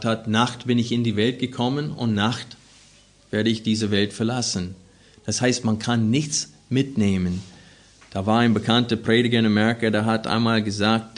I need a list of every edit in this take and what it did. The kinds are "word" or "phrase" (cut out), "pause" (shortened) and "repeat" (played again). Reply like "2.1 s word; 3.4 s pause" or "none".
none